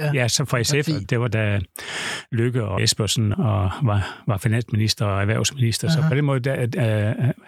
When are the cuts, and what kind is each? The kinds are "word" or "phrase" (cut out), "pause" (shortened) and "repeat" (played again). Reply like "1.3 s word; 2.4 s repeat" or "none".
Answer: 1.0 s word; 2.8 s word; 3.3 s word